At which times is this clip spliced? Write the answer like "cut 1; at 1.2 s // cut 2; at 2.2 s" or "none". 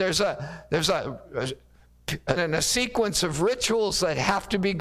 cut 1; at 2.4 s